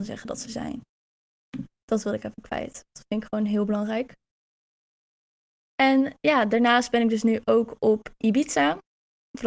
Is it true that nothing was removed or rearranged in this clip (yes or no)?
no